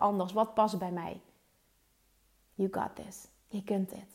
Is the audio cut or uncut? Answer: uncut